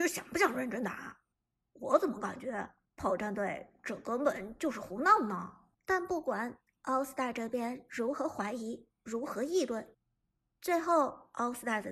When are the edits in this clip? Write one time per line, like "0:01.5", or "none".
0:01.5
0:02.8
0:05.7